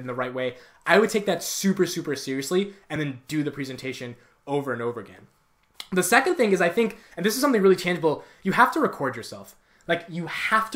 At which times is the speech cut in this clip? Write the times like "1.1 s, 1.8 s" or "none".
none